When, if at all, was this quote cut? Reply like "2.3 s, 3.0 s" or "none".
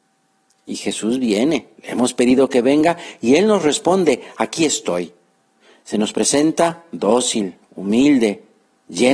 1.8 s